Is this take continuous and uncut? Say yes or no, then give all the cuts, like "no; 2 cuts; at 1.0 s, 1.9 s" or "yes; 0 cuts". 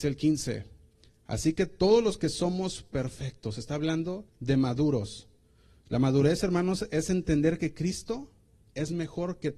no; 1 cut; at 4.3 s